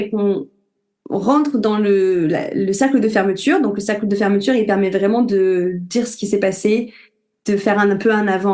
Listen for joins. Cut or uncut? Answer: uncut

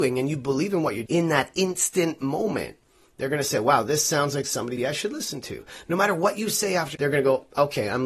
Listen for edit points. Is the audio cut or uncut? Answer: cut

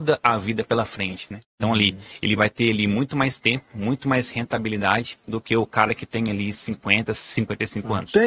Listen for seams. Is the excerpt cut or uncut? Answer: cut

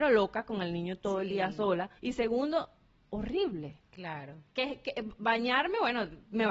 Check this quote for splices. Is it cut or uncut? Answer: cut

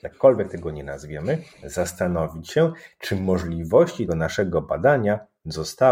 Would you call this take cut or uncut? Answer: cut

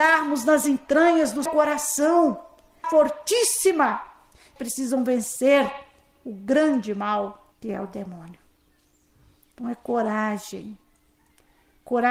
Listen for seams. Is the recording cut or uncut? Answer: cut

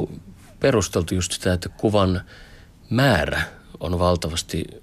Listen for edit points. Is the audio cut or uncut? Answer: uncut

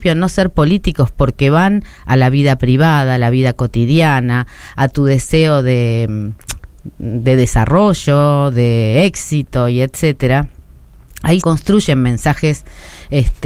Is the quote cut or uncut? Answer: cut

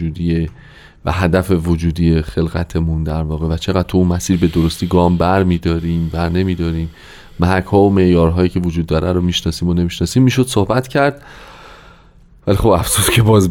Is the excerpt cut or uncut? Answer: uncut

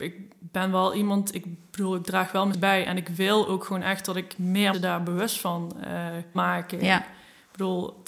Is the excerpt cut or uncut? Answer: cut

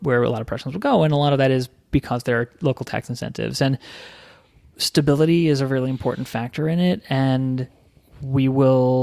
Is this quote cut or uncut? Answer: uncut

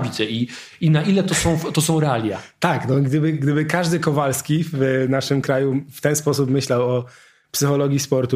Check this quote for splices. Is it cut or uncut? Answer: uncut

